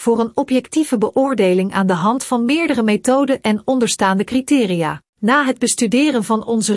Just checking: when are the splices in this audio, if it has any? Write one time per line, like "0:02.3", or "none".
0:05.1